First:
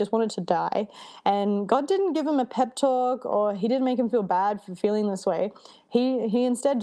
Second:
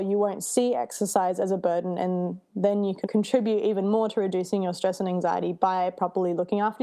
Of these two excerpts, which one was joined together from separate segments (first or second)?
second